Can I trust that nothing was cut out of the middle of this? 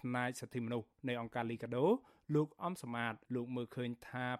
no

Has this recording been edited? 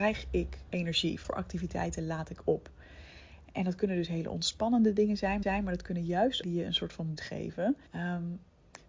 yes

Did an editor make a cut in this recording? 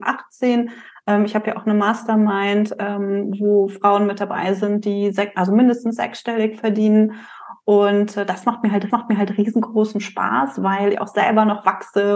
yes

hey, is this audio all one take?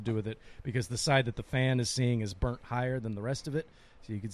yes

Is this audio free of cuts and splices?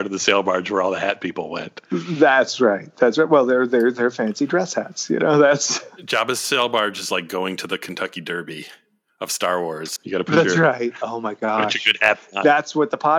yes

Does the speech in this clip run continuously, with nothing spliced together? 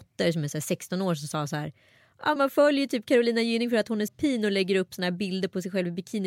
no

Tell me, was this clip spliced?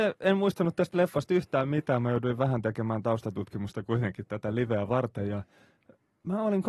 no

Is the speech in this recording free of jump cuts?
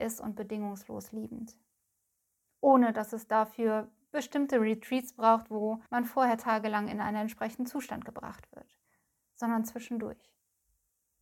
no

